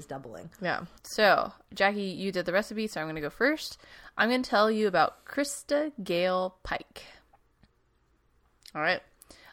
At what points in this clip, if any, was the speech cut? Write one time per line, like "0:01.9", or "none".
0:01.0